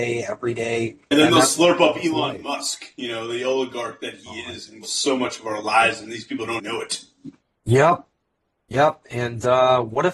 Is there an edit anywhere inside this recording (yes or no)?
yes